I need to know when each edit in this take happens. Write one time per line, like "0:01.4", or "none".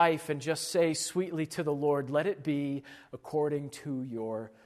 none